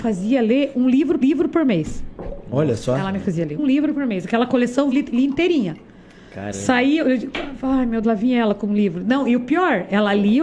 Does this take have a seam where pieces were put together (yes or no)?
yes